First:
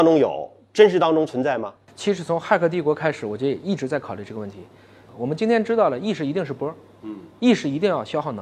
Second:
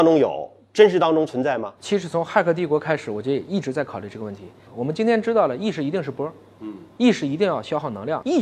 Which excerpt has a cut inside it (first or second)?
second